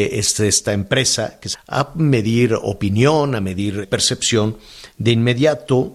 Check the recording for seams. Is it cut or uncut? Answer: cut